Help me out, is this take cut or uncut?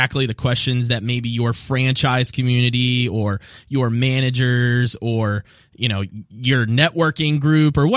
uncut